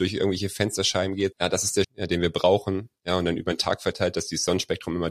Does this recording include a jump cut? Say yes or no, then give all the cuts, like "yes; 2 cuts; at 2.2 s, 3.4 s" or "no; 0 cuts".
yes; 2 cuts; at 1.3 s, 1.8 s